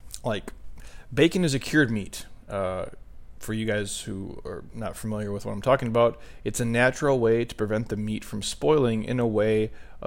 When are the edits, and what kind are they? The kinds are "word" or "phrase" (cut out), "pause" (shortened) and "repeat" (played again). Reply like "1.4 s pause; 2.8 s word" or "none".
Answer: none